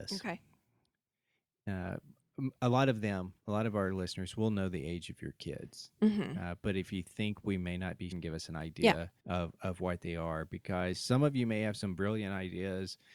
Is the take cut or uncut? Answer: cut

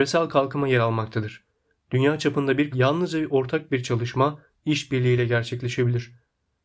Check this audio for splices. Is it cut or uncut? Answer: cut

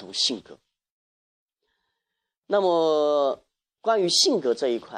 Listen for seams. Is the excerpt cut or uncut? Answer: uncut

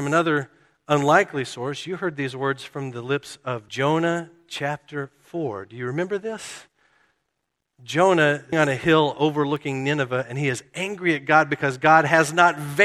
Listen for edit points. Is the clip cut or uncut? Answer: cut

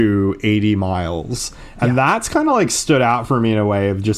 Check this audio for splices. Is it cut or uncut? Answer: uncut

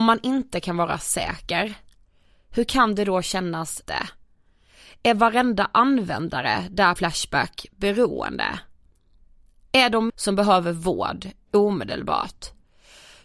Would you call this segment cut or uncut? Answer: cut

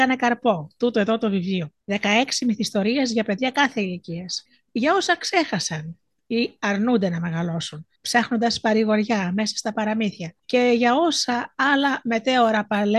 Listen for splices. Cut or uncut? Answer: cut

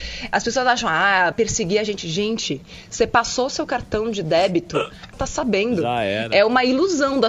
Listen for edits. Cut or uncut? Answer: cut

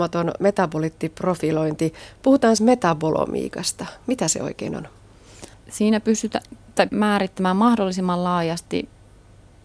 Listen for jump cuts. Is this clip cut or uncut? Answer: cut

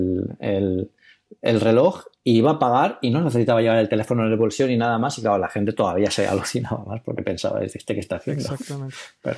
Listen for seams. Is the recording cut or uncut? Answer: uncut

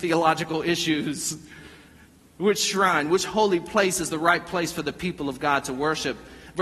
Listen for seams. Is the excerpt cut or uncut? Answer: uncut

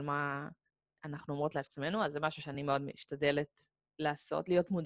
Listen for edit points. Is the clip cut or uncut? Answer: uncut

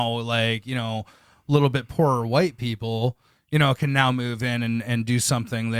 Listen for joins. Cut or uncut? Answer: uncut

